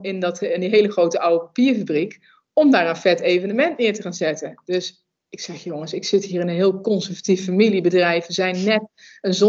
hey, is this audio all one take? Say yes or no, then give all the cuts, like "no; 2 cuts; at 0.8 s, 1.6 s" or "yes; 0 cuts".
yes; 0 cuts